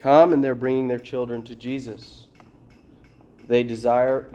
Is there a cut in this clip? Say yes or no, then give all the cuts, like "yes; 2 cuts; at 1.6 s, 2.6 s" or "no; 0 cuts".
no; 0 cuts